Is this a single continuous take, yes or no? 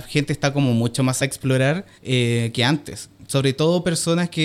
no